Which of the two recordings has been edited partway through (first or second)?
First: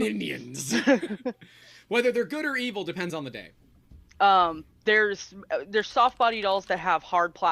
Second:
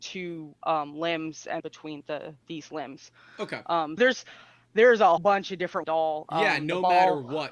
second